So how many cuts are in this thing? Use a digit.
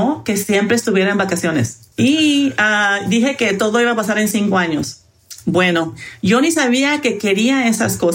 1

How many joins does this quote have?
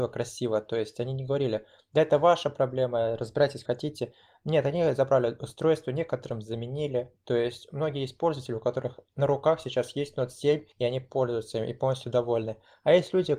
2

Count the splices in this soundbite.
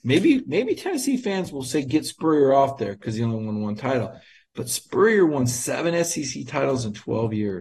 0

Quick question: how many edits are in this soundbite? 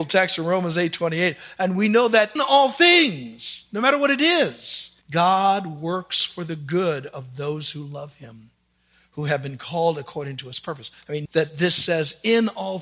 3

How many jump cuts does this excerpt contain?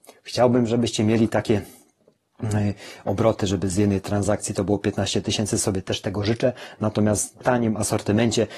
1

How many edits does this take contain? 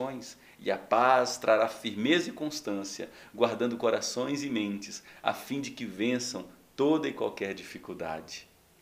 0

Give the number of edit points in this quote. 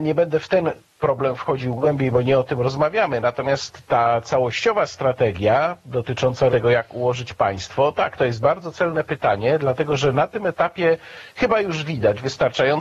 2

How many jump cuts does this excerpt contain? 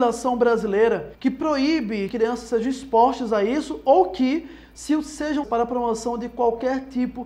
3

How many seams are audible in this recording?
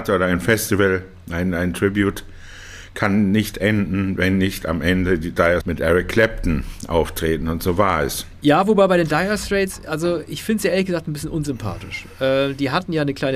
1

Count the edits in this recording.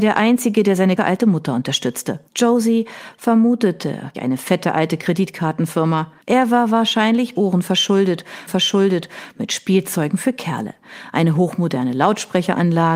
6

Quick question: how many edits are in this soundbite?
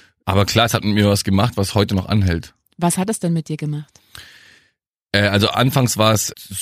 0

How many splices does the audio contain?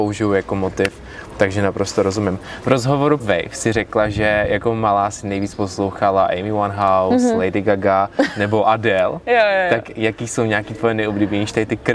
1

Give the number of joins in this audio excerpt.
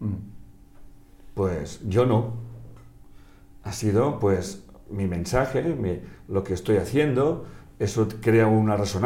0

